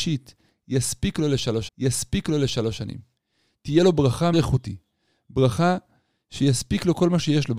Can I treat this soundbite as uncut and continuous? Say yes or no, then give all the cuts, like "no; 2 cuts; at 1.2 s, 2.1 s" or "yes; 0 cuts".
no; 2 cuts; at 1.7 s, 4.3 s